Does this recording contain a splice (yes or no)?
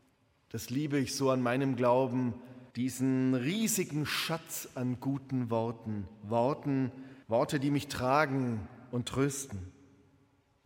yes